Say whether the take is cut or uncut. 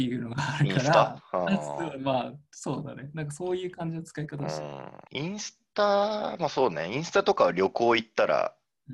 cut